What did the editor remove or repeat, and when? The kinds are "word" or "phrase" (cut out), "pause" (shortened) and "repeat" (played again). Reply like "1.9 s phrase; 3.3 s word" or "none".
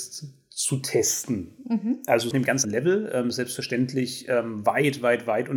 2.3 s phrase; 2.6 s word